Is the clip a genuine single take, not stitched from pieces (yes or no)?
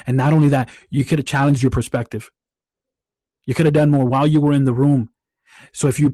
yes